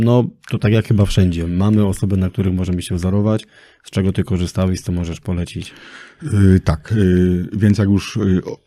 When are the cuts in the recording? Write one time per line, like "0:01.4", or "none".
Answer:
none